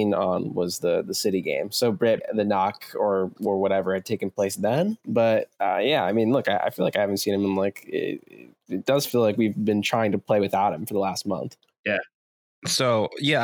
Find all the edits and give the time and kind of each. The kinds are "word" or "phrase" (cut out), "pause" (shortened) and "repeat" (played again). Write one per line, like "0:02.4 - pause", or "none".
0:02.2 - word